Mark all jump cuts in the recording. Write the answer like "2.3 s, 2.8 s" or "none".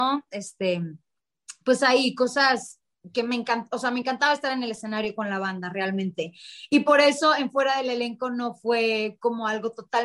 none